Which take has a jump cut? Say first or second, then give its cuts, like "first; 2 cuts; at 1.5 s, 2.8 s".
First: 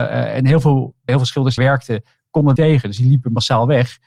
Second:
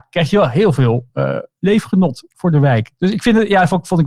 first; 3 cuts; at 1.1 s, 1.6 s, 2.6 s